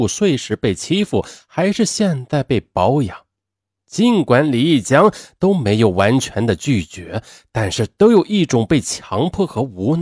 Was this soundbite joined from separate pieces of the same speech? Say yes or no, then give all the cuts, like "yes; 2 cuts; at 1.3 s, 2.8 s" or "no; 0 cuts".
no; 0 cuts